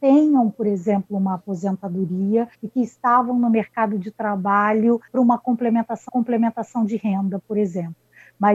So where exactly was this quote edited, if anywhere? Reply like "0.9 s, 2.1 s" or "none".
2.5 s, 5.1 s, 6.1 s